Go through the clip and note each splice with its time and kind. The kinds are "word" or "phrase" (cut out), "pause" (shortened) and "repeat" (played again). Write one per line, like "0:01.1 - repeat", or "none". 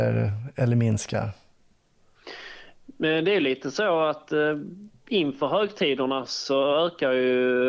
none